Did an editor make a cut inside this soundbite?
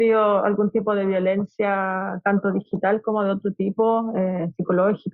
no; 0 cuts

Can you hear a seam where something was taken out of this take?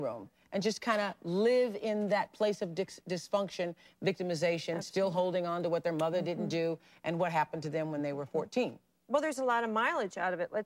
no; 0 cuts

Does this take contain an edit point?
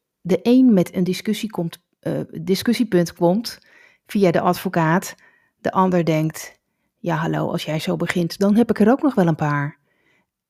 no; 0 cuts

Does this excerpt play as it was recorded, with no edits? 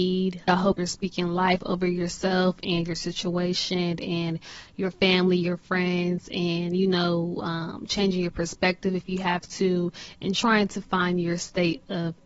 no; 1 cut; at 10.3 s

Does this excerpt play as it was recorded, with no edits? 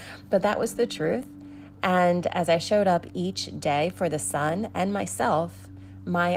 yes; 0 cuts

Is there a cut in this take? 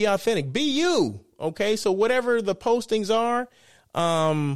no; 0 cuts

